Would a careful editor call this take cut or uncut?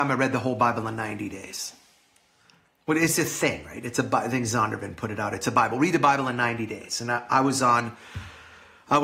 uncut